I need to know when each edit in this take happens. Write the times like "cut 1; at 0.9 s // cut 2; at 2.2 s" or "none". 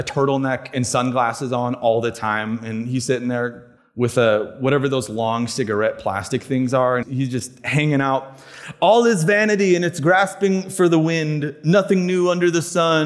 cut 1; at 3.8 s // cut 2; at 7.0 s